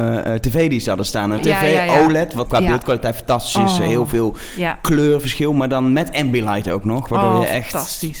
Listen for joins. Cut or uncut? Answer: cut